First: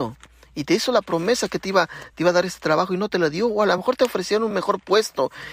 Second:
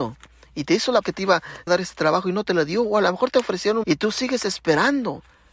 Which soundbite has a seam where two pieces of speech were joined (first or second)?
second